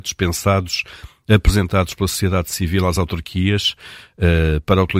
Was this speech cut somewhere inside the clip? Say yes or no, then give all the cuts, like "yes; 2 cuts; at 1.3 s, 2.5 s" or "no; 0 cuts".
no; 0 cuts